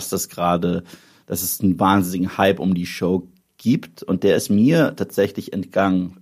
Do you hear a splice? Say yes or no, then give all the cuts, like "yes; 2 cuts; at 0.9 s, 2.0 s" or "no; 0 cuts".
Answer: no; 0 cuts